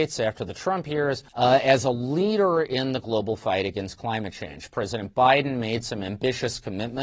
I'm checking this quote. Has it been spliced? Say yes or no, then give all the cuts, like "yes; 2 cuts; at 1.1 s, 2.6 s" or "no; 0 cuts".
yes; 1 cut; at 1.3 s